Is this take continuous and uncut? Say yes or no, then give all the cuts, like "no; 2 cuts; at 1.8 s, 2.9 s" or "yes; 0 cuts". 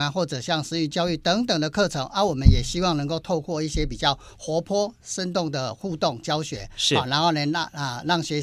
yes; 0 cuts